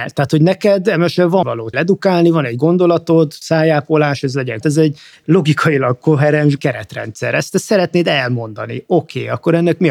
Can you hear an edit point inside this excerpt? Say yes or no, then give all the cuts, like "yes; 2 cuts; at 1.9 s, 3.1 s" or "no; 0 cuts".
yes; 5 cuts; at 1.4 s, 1.7 s, 3.4 s, 4.6 s, 6.6 s